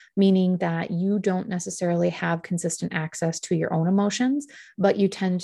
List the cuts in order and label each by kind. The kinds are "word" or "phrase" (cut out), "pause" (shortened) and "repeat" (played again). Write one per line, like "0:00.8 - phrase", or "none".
none